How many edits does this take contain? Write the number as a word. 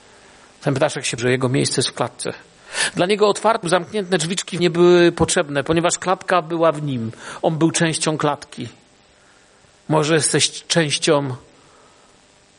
three